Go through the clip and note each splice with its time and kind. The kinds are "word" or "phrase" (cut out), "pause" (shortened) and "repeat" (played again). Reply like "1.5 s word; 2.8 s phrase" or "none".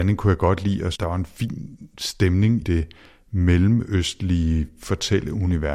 1.0 s word; 2.6 s word